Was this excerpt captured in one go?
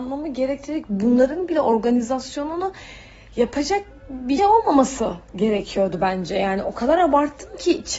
no; 1 cut; at 4.4 s

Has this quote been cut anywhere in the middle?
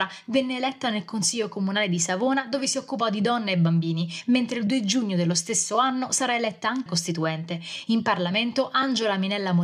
yes; 1 cut; at 6.9 s

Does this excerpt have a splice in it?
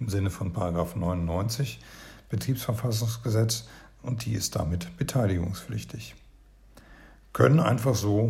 no; 0 cuts

